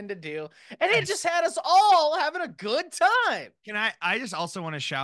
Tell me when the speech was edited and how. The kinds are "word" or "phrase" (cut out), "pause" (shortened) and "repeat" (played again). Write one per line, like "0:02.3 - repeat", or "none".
none